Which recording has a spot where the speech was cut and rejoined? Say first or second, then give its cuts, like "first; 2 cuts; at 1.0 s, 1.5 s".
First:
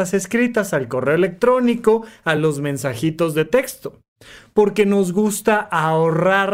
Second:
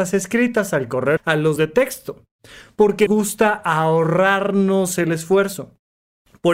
second; 3 cuts; at 1.2 s, 1.6 s, 3.1 s